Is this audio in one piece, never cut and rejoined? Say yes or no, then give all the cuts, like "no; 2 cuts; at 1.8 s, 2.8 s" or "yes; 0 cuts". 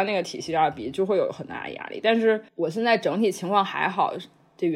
no; 1 cut; at 2.5 s